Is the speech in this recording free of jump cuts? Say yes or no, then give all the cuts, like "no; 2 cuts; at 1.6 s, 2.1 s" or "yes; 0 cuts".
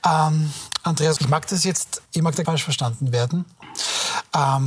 no; 3 cuts; at 1.2 s, 2.1 s, 2.4 s